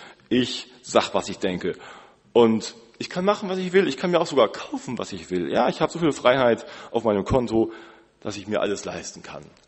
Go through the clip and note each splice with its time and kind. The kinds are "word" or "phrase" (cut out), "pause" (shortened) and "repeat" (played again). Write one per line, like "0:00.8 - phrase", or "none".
none